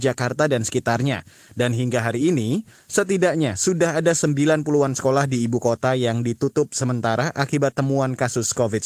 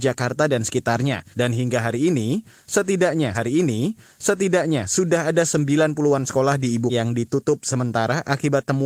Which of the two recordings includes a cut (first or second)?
second